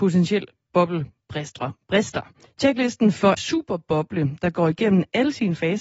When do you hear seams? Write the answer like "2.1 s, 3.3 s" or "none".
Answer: 2.4 s, 3.4 s